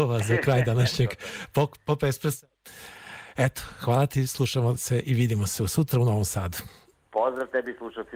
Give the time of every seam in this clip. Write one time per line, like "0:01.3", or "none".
none